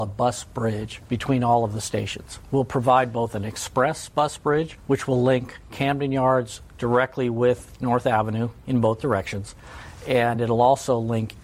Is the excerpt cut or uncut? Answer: uncut